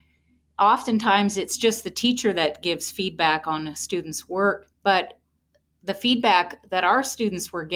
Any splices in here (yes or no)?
yes